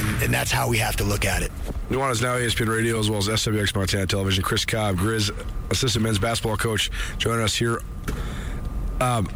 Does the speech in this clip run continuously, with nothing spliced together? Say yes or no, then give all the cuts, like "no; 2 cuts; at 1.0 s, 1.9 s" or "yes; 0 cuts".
yes; 0 cuts